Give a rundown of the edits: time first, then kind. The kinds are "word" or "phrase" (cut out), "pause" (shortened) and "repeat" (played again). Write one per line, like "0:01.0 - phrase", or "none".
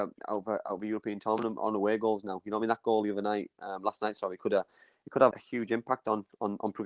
0:05.3 - word